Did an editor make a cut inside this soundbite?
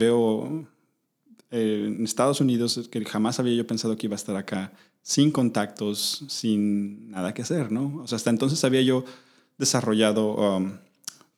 no; 0 cuts

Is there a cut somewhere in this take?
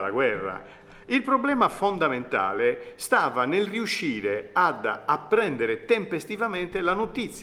no; 0 cuts

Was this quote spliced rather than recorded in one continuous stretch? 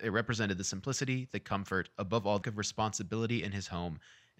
yes; 1 cut; at 2.4 s

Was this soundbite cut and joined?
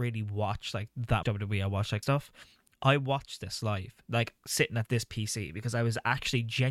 yes; 3 cuts; at 1.2 s, 2.0 s, 4.4 s

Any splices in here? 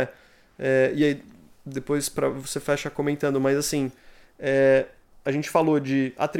no; 0 cuts

